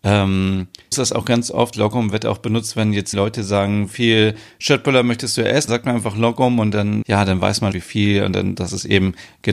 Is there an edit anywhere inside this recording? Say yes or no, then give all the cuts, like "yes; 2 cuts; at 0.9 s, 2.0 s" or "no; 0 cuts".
yes; 8 cuts; at 0.9 s, 1.7 s, 3.1 s, 3.9 s, 5.7 s, 7.0 s, 7.7 s, 8.6 s